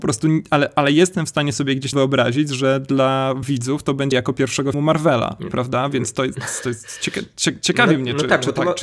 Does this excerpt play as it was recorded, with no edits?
no; 4 cuts; at 1.9 s, 3.4 s, 4.1 s, 4.7 s

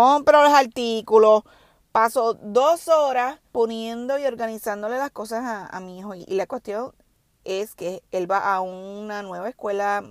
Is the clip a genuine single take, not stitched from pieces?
no; 1 cut; at 3.5 s

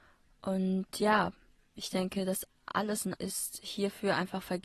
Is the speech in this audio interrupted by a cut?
yes; 2 cuts; at 2.5 s, 3.1 s

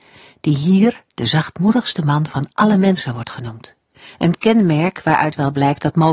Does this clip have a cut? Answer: yes; 1 cut; at 3.9 s

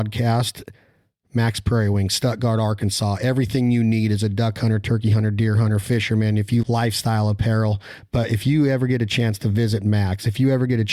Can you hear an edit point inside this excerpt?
yes; 1 cut; at 6.6 s

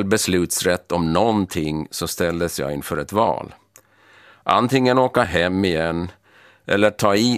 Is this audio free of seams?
yes; 0 cuts

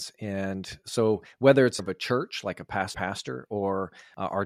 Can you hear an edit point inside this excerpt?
yes; 2 cuts; at 1.8 s, 2.9 s

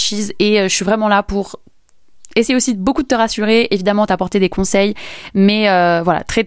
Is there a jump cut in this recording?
no; 0 cuts

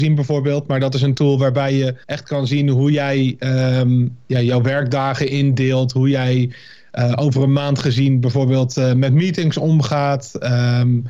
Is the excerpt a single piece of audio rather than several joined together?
no; 1 cut; at 2.0 s

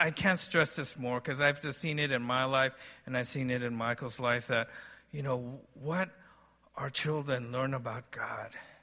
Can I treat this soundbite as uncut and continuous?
yes; 0 cuts

